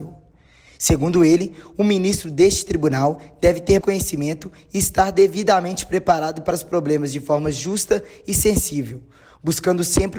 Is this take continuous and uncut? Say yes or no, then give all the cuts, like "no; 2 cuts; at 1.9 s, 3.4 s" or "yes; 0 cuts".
no; 2 cuts; at 3.8 s, 6.5 s